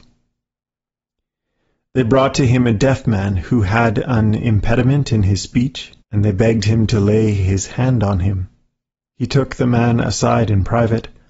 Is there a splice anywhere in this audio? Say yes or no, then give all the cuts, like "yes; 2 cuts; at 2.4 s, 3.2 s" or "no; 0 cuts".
yes; 2 cuts; at 6.0 s, 8.9 s